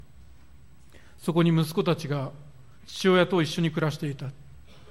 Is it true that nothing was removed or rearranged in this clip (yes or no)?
no